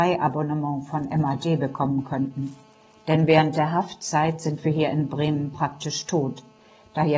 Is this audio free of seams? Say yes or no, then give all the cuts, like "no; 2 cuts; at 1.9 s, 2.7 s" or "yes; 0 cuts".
yes; 0 cuts